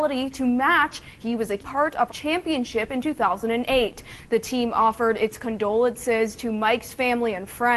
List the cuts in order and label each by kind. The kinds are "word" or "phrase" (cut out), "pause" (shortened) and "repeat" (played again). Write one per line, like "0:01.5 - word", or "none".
0:01.2 - word
0:01.6 - word
0:02.1 - phrase